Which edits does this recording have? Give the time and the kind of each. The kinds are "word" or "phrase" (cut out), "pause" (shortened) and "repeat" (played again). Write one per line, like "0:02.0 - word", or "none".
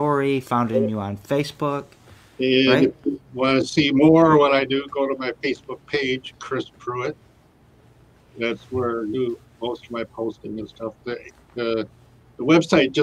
none